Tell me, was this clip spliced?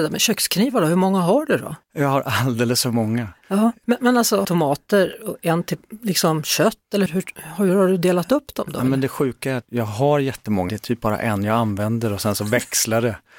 yes; 5 cuts; at 1.8 s, 4.4 s, 7.1 s, 9.6 s, 10.7 s

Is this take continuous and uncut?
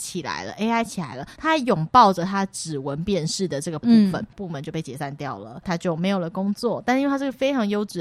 yes; 0 cuts

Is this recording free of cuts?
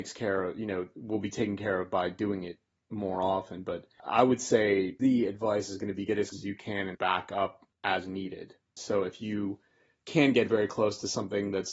no; 3 cuts; at 5.0 s, 6.3 s, 6.9 s

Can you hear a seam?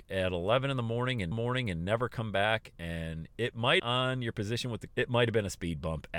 yes; 3 cuts; at 1.3 s, 3.8 s, 4.9 s

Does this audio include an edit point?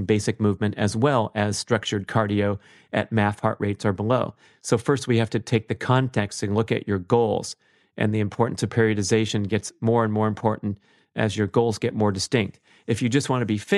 no; 0 cuts

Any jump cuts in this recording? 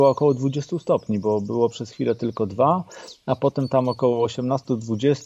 no; 0 cuts

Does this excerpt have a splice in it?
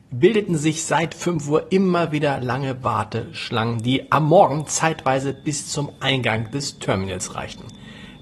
no; 0 cuts

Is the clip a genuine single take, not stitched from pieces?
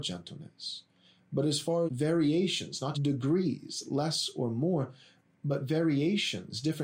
no; 3 cuts; at 1.9 s, 2.9 s, 5.2 s

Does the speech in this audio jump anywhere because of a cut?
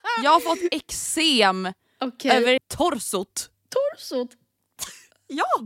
yes; 1 cut; at 2.6 s

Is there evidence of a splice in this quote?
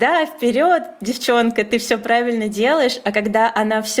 no; 0 cuts

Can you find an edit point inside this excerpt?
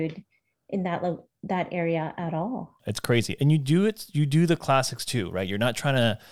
yes; 1 cut; at 2.8 s

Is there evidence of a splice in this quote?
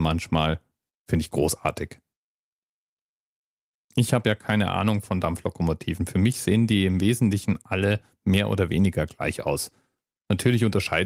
no; 0 cuts

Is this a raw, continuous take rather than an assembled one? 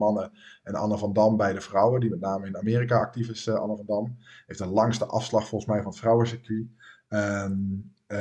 yes; 0 cuts

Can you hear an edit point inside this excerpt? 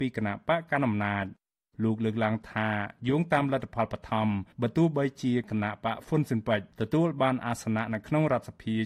no; 0 cuts

